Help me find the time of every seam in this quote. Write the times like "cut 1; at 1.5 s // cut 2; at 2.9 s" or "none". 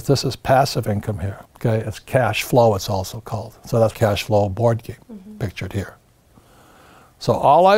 cut 1; at 1.5 s // cut 2; at 3.9 s // cut 3; at 5.0 s